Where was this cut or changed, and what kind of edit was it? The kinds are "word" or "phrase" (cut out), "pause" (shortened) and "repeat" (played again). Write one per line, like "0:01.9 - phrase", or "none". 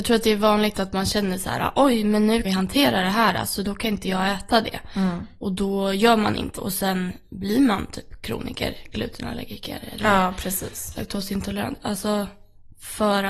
0:02.4 - phrase
0:06.6 - word